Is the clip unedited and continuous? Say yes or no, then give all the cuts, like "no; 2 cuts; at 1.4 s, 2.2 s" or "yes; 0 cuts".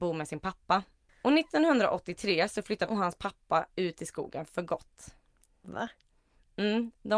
no; 1 cut; at 2.9 s